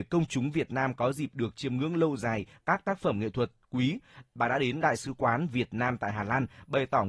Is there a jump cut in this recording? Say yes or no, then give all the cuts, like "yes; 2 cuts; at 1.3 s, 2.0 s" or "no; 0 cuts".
no; 0 cuts